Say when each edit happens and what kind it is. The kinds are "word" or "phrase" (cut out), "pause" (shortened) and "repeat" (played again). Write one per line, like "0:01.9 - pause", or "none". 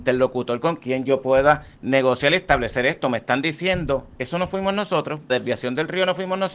0:05.3 - word